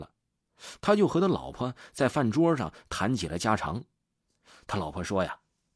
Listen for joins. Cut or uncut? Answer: uncut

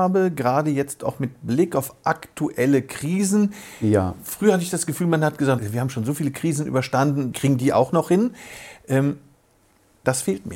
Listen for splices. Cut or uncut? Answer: cut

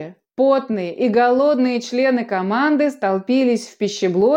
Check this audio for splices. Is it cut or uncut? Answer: uncut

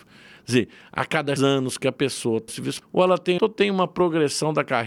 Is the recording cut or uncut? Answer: cut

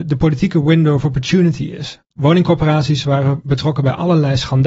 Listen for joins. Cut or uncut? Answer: cut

